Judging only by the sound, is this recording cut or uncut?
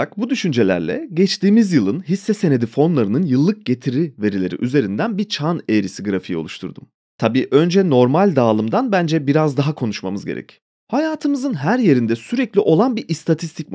uncut